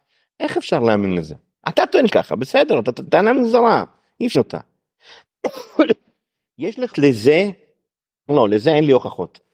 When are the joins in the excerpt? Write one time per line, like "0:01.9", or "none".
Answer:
0:02.1
0:03.1
0:04.3
0:06.9
0:08.3